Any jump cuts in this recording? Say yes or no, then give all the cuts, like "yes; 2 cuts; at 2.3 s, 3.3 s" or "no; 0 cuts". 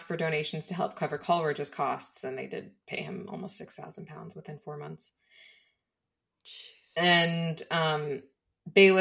no; 0 cuts